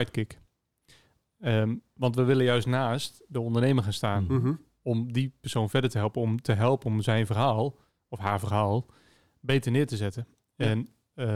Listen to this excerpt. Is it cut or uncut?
uncut